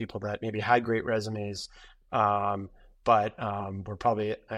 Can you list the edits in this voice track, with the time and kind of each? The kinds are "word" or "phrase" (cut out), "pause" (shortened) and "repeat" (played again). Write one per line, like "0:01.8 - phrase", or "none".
none